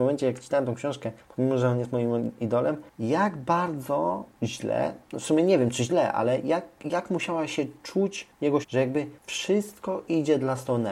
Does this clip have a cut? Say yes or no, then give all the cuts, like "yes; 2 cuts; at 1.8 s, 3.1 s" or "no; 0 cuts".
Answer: yes; 1 cut; at 8.6 s